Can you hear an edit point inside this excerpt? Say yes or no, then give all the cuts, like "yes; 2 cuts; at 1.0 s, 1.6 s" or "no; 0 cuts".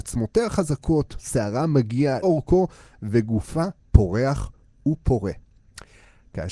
yes; 1 cut; at 2.2 s